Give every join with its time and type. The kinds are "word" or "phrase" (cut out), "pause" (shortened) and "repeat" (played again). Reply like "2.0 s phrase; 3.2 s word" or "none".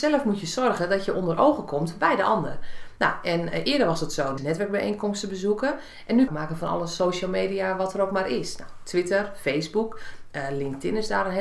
4.4 s phrase; 6.3 s phrase